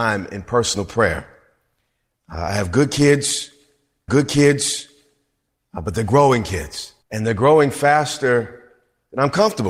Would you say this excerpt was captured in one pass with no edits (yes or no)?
no